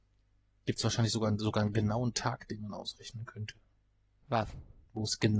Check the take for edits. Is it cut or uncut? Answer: uncut